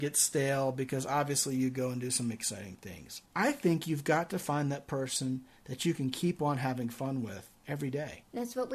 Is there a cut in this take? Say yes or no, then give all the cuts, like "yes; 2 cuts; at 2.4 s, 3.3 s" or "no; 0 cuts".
yes; 1 cut; at 3.3 s